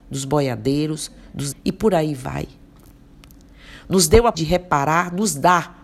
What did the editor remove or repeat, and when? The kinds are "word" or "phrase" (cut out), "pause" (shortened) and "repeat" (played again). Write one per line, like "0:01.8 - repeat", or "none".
0:01.5 - word
0:04.3 - word